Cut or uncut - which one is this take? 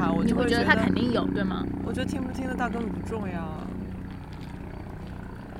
uncut